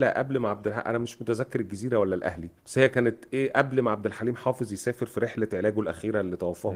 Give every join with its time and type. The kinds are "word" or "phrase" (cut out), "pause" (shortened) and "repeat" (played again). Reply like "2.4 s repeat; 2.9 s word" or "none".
2.6 s pause

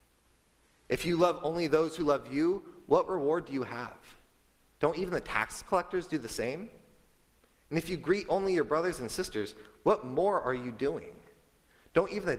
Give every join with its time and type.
none

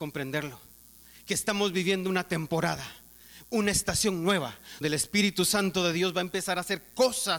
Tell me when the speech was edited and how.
4.8 s word

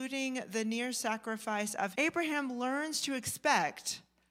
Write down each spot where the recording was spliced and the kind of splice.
1.9 s phrase

